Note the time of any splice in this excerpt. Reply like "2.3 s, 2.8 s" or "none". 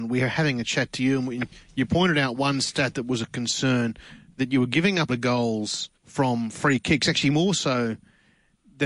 5.1 s, 5.9 s

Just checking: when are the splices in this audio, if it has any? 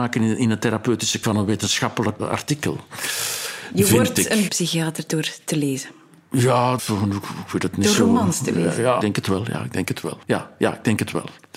1.2 s, 2.2 s, 4.5 s, 6.8 s, 9.0 s, 10.2 s

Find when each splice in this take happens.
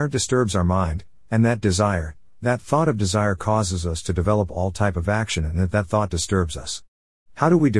none

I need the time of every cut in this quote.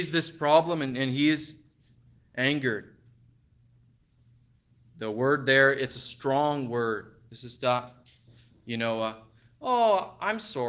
none

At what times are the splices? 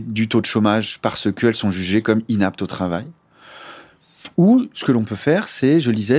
none

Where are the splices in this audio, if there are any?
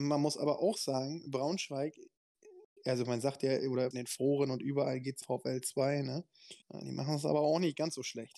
3.9 s, 5.2 s, 6.6 s

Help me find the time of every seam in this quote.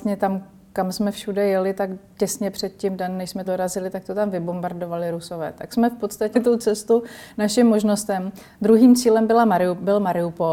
3.5 s, 6.3 s

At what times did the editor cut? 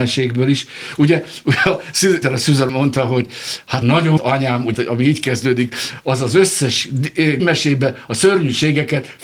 2.2 s, 2.7 s, 3.8 s, 4.2 s, 4.7 s, 7.4 s

